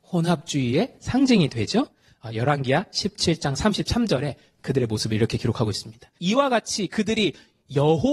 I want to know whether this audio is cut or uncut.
cut